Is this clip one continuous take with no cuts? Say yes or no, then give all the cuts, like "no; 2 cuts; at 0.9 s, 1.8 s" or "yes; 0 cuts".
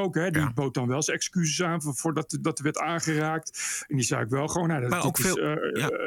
yes; 0 cuts